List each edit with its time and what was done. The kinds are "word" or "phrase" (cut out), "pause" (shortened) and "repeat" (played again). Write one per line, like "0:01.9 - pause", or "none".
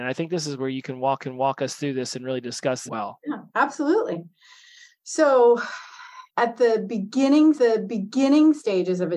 0:01.2 - repeat
0:02.9 - phrase
0:03.5 - pause
0:06.3 - pause
0:07.6 - repeat